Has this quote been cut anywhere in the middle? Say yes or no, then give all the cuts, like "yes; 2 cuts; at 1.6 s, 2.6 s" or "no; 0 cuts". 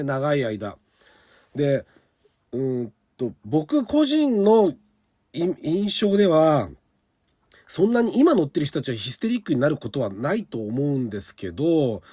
no; 0 cuts